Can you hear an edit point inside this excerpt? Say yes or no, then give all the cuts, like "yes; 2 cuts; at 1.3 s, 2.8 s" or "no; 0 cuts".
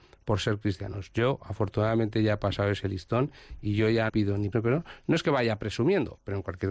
yes; 2 cuts; at 4.1 s, 4.5 s